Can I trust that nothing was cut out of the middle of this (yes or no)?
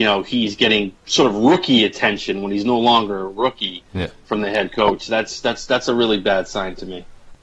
no